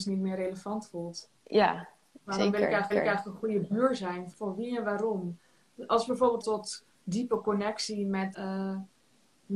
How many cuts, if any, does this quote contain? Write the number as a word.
six